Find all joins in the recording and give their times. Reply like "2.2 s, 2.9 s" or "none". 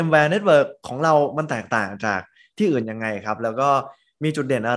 none